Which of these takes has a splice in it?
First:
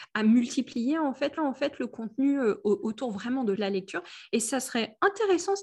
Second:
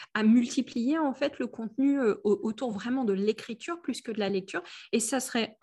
first; 2 cuts; at 1.4 s, 3.6 s

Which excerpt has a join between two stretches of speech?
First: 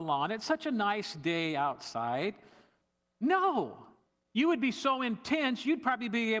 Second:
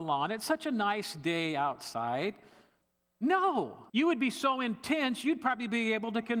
second; 1 cut; at 3.9 s

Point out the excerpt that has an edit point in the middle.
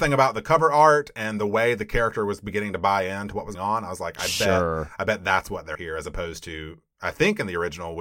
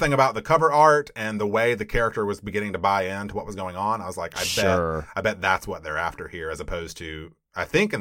first; 2 cuts; at 3.5 s, 5.7 s

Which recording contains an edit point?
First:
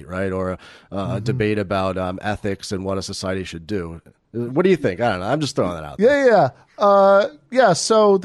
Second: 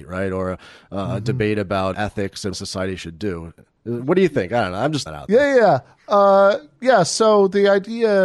second; 3 cuts; at 1.9 s, 2.5 s, 5.1 s

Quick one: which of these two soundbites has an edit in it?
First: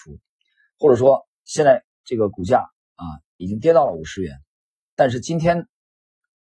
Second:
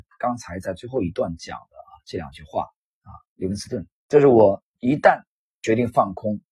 second; 2 cuts; at 4.0 s, 4.7 s

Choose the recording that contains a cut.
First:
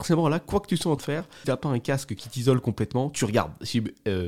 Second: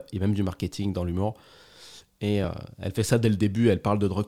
first; 2 cuts; at 1.0 s, 1.4 s

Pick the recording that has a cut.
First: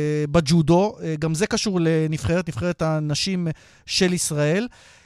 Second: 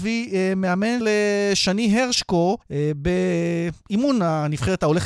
second; 2 cuts; at 1.0 s, 2.6 s

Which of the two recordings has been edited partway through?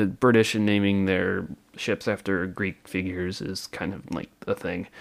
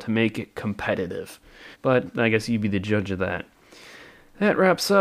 second; 1 cut; at 1.7 s

